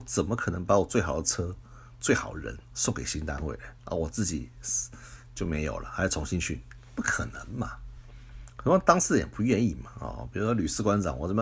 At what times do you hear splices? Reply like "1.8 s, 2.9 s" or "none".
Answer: 3.8 s